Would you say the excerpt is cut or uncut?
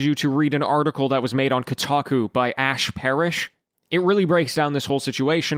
uncut